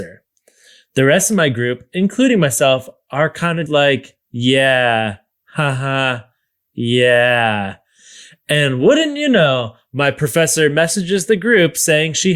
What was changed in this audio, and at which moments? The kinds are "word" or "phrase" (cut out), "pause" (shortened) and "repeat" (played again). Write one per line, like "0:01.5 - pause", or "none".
0:03.7 - word
0:04.2 - pause